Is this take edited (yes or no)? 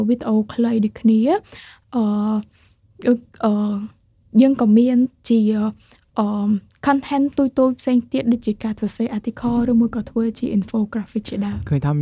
no